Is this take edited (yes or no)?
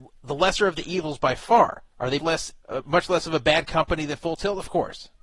yes